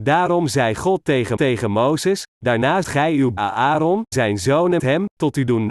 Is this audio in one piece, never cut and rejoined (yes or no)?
no